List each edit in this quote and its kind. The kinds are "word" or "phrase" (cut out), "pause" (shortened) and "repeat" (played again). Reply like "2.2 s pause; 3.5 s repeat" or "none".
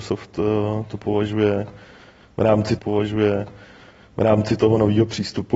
2.8 s repeat